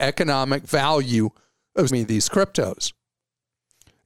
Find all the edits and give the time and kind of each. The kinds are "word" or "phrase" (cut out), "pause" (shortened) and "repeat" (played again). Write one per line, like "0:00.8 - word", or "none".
0:01.9 - word